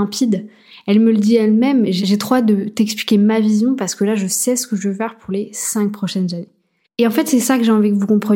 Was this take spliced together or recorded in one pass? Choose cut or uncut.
uncut